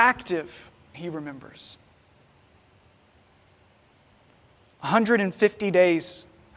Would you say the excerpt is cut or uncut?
cut